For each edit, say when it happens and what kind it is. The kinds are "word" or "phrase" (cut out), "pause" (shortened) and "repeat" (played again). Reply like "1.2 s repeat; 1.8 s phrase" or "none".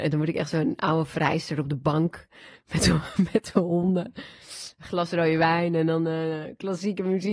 none